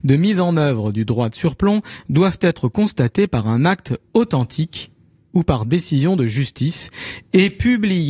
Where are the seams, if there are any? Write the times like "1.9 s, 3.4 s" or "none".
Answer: none